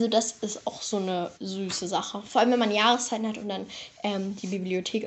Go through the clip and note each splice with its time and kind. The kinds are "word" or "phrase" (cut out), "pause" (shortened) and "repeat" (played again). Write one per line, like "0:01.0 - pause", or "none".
0:01.4 - pause